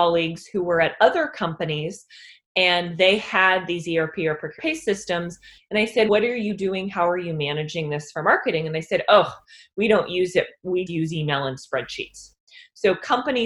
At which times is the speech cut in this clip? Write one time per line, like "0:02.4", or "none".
0:04.6
0:06.1
0:10.9

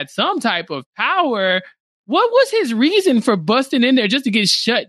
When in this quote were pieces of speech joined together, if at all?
none

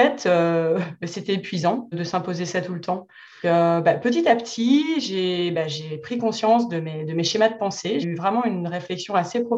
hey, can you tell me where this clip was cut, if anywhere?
0:01.9
0:03.4
0:08.0

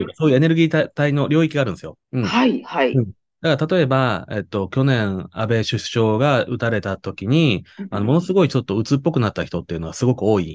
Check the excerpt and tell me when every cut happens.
none

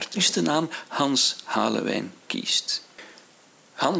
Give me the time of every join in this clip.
0:02.2

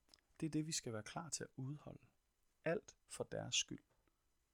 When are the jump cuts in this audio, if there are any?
none

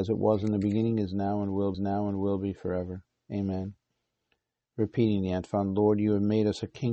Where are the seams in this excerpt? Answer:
0:01.7

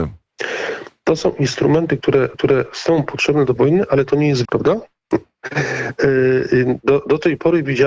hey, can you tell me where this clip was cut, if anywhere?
0:02.3
0:03.6
0:04.4

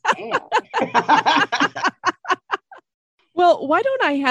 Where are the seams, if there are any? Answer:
none

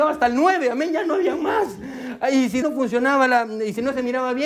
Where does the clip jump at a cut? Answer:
0:02.6

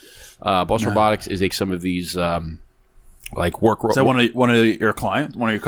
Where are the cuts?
0:01.5

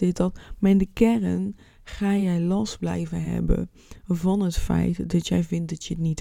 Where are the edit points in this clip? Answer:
none

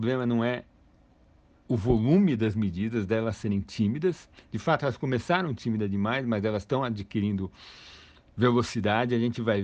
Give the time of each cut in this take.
none

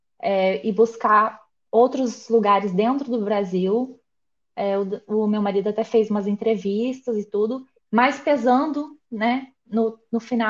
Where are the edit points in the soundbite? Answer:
none

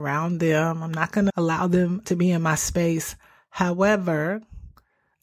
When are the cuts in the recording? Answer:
0:01.3
0:02.0

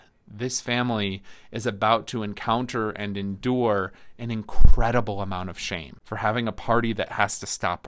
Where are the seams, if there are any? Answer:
0:06.0

